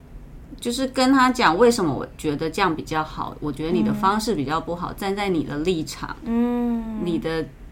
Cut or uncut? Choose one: uncut